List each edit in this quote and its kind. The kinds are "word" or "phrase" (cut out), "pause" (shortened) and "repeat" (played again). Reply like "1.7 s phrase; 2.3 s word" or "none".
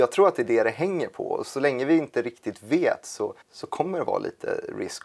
3.4 s pause